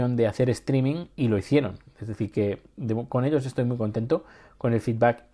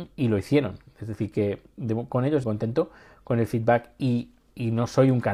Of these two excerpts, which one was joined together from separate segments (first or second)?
second